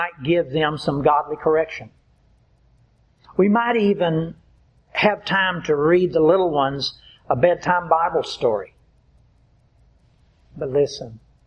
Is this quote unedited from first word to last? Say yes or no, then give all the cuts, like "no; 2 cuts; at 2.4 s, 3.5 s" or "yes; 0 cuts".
yes; 0 cuts